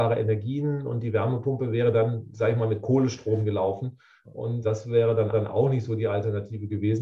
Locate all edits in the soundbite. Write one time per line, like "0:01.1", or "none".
0:04.6
0:05.3

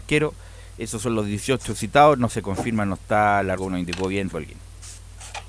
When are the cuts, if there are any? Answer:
0:02.3
0:03.6
0:04.3

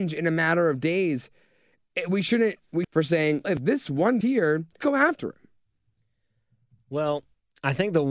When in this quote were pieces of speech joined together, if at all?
0:02.8
0:03.4
0:04.2
0:04.8

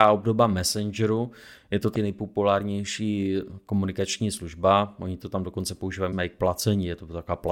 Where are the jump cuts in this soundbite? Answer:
0:02.0
0:06.1

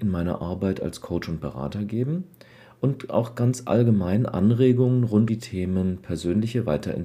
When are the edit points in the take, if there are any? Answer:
0:05.3

